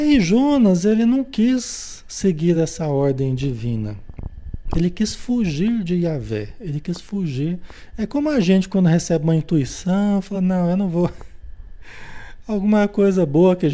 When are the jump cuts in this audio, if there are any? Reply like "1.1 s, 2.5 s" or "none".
none